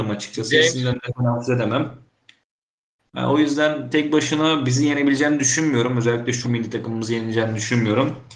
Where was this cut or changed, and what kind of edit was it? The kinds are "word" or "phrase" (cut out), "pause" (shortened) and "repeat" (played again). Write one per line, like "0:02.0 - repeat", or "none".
0:03.9 - word
0:06.4 - word

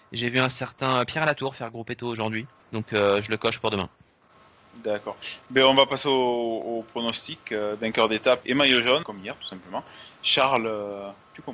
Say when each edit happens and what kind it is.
0:02.6 - pause
0:08.4 - word
0:09.0 - word

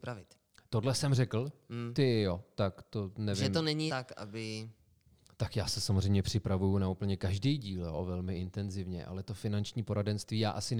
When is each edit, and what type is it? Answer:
0:03.9 - word

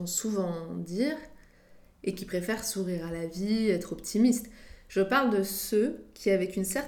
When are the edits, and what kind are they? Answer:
none

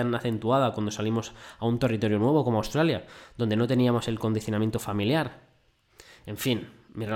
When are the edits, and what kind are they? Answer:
none

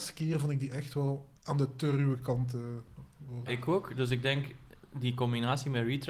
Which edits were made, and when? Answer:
0:01.4 - pause
0:03.5 - word

